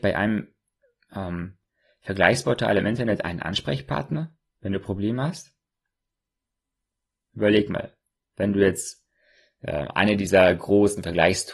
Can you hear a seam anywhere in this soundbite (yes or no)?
no